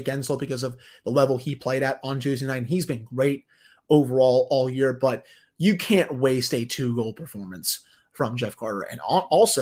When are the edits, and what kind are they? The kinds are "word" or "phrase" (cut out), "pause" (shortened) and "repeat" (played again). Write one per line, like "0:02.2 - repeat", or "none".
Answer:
none